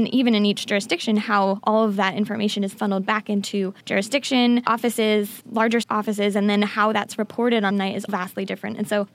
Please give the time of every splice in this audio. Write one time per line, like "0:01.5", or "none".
0:02.7
0:05.8
0:07.7
0:08.1